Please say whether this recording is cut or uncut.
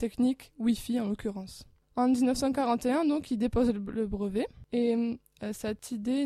uncut